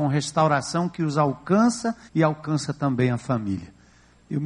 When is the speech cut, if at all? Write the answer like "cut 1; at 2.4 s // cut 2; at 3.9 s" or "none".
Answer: cut 1; at 2.1 s

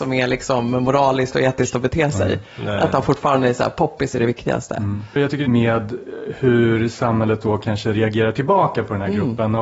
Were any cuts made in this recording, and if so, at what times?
cut 1; at 5.4 s

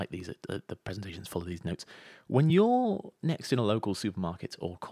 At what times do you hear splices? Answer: none

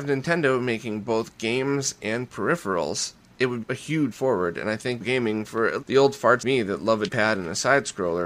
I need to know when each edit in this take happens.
cut 1; at 3.6 s // cut 2; at 4.1 s // cut 3; at 5.0 s // cut 4; at 5.8 s // cut 5; at 6.4 s // cut 6; at 7.1 s

